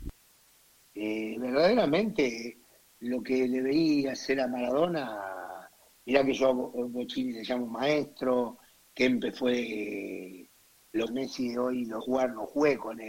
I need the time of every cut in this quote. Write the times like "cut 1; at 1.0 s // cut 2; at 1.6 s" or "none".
cut 1; at 11.1 s // cut 2; at 12.0 s

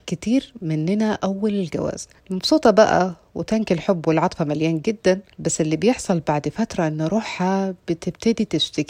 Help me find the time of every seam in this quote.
cut 1; at 2.2 s // cut 2; at 5.3 s

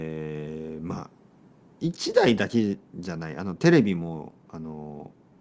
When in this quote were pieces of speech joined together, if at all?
none

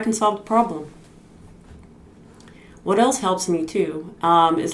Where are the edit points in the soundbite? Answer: none

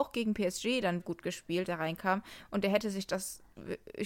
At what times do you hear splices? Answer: cut 1; at 1.0 s // cut 2; at 1.7 s

